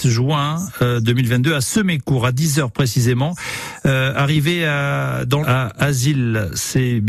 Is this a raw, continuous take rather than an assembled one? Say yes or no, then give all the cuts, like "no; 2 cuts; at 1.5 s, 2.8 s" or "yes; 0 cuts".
no; 1 cut; at 5.4 s